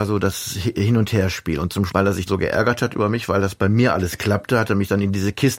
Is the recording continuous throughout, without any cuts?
no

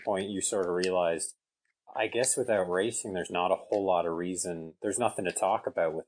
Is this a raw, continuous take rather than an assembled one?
yes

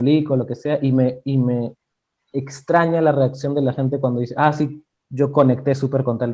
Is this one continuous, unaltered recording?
yes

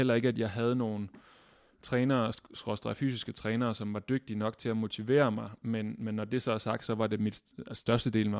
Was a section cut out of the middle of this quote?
no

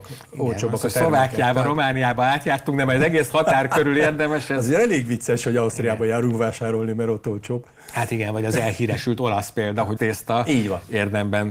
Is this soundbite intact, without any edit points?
no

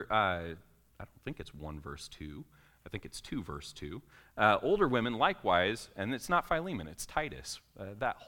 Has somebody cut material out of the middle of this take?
no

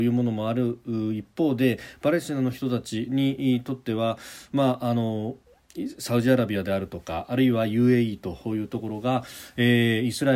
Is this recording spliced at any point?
no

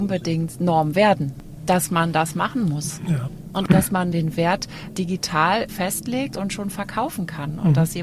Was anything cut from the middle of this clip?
no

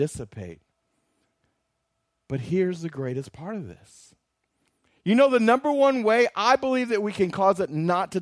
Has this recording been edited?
no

